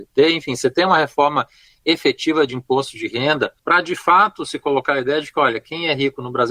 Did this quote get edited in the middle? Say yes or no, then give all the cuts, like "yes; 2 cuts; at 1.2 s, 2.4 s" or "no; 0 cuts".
no; 0 cuts